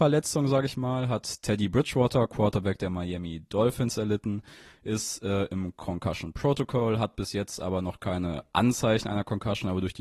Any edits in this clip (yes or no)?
no